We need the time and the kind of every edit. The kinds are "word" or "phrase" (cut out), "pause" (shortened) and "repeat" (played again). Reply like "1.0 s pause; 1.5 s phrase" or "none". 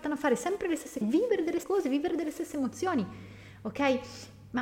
1.0 s word; 1.6 s word